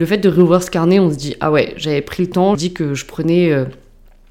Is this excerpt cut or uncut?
cut